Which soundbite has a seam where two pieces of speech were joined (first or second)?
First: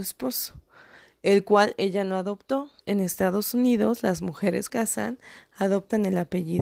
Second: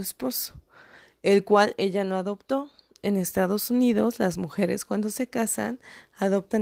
first